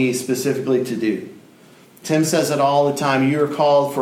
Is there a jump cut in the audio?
no; 0 cuts

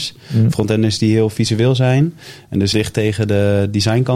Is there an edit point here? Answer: yes; 1 cut; at 2.7 s

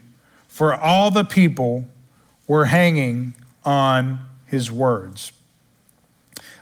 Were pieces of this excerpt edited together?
no; 0 cuts

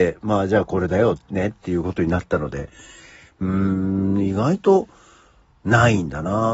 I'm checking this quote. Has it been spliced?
no; 0 cuts

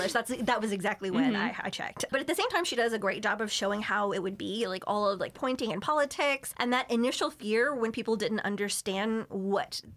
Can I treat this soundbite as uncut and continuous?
no; 1 cut; at 5.3 s

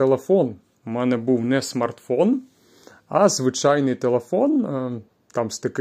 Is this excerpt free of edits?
yes; 0 cuts

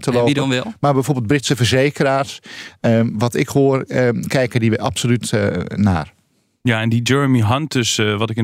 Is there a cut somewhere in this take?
no; 0 cuts

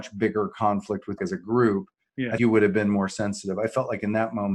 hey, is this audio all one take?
no; 2 cuts; at 1.2 s, 2.4 s

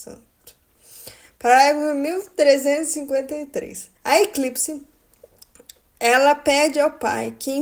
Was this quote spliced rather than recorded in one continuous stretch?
yes; 1 cut; at 4.0 s

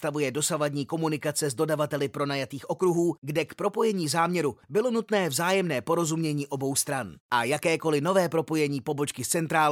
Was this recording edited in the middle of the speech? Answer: yes; 1 cut; at 4.6 s

